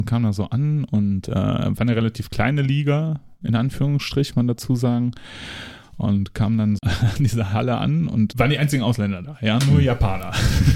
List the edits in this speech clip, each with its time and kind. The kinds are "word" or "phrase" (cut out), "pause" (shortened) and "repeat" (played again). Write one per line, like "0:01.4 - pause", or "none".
0:04.3 - word
0:06.8 - word
0:08.3 - word